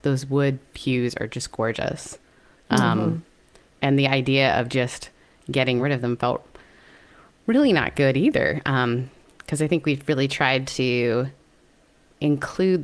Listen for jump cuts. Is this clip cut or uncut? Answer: uncut